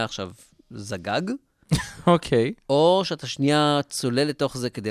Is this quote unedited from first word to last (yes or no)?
yes